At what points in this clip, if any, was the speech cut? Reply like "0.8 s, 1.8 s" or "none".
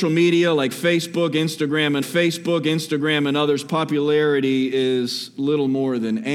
2.0 s